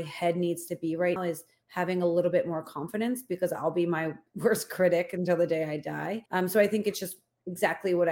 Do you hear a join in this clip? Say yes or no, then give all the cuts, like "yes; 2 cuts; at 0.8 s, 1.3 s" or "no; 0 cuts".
yes; 3 cuts; at 1.2 s, 4.3 s, 6.3 s